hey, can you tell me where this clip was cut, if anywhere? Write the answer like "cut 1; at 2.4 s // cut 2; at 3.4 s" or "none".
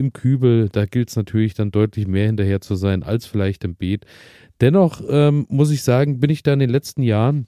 none